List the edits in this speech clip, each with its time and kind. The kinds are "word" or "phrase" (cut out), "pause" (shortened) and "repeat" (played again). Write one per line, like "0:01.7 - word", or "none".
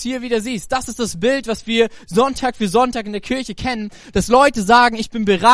none